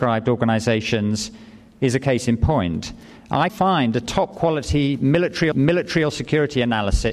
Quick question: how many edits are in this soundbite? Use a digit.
2